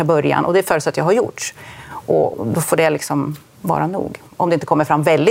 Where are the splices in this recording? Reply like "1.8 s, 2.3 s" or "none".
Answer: 2.3 s